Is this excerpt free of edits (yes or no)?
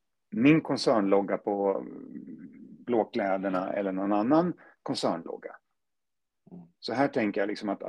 yes